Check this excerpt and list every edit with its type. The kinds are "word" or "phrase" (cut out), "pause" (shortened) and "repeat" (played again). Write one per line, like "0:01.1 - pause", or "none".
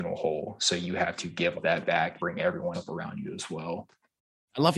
0:01.5 - word
0:02.2 - word
0:02.7 - word